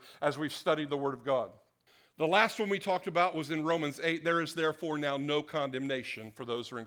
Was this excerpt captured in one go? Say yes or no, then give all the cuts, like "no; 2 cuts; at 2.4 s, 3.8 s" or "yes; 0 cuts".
no; 1 cut; at 1.9 s